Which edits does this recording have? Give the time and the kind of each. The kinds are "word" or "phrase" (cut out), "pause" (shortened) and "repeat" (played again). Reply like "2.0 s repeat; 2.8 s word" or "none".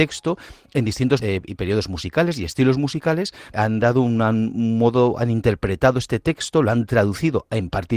1.2 s word; 3.5 s phrase

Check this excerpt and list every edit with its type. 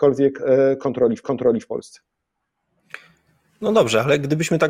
1.2 s repeat

